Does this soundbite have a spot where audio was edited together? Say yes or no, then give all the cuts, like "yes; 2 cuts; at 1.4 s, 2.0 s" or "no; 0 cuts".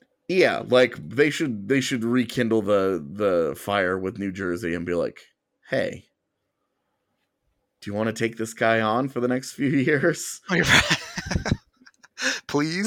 no; 0 cuts